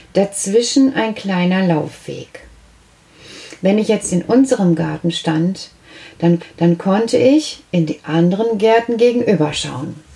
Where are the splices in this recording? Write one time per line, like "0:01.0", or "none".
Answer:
0:06.4

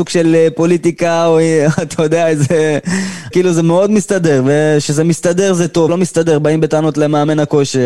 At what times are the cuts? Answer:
0:03.3
0:05.9

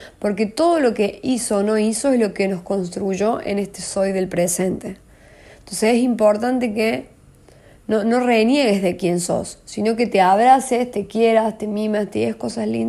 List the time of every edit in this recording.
none

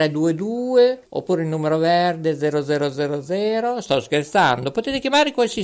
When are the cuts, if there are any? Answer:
0:01.0

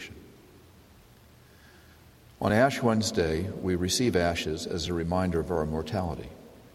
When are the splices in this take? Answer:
none

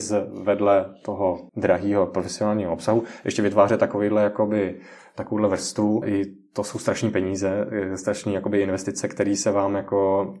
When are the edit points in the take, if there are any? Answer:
0:01.5
0:06.0

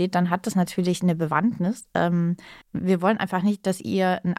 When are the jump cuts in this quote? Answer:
0:02.6

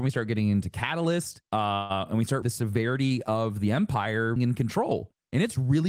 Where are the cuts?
0:01.4
0:02.4
0:04.4

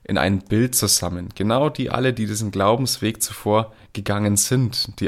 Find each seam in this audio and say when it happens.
none

